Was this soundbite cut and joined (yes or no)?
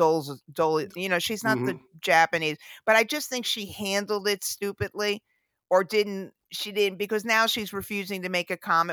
no